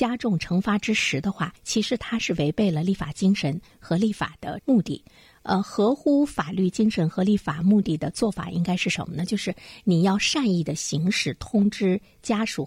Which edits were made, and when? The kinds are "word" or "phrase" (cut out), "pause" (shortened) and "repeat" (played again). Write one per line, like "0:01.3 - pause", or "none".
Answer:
0:01.6 - pause

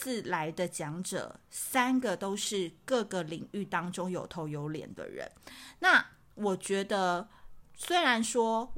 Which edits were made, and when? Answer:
none

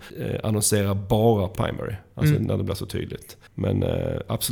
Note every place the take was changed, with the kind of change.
0:01.6 - word
0:03.5 - pause

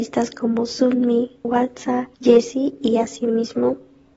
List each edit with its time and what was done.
0:01.4 - word
0:02.1 - pause

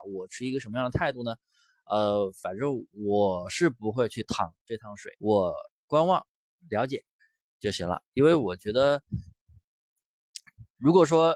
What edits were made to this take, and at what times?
0:05.1 - pause
0:07.2 - pause

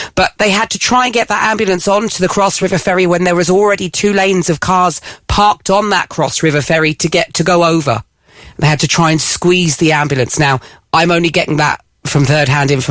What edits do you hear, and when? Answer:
none

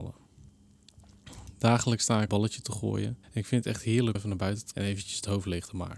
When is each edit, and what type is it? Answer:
0:02.3 - phrase
0:03.2 - pause
0:04.1 - word
0:04.7 - word

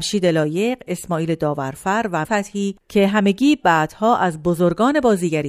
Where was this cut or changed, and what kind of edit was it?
0:02.2 - word
0:02.8 - pause

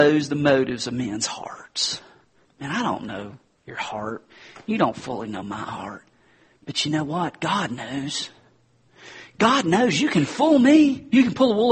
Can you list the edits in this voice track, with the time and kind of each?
none

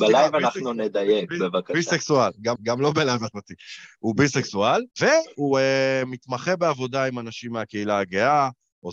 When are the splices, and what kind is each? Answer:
0:02.6 - repeat
0:03.3 - word
0:04.9 - pause

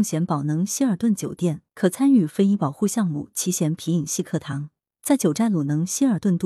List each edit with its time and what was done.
0:01.7 - pause

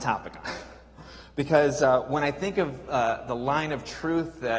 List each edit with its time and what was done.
none

